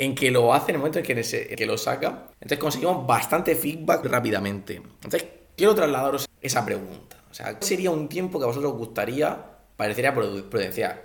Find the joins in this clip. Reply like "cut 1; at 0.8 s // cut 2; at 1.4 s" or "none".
cut 1; at 1.5 s // cut 2; at 2.3 s // cut 3; at 4.0 s // cut 4; at 6.3 s // cut 5; at 7.6 s